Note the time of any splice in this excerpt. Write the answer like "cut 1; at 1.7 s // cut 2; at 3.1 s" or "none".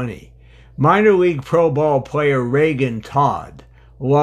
none

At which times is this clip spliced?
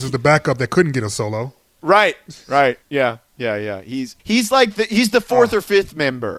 cut 1; at 2.8 s // cut 2; at 4.2 s

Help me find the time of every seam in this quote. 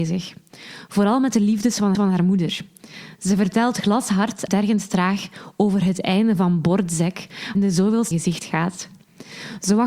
cut 1; at 1.9 s // cut 2; at 4.5 s // cut 3; at 7.5 s // cut 4; at 8.1 s

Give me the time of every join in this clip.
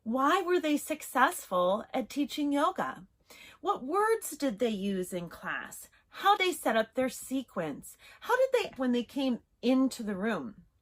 cut 1; at 6.4 s // cut 2; at 8.8 s

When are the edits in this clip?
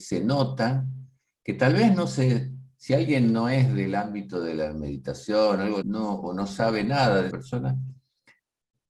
cut 1; at 5.8 s // cut 2; at 7.3 s

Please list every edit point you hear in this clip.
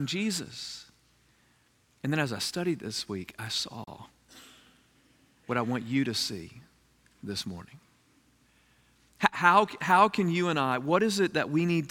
none

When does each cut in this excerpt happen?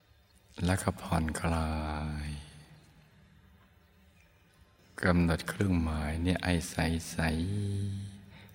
none

